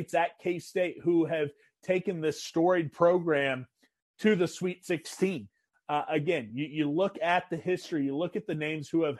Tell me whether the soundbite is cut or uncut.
uncut